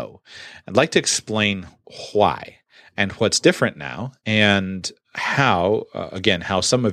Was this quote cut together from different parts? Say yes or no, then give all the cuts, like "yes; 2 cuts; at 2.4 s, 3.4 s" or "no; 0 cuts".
no; 0 cuts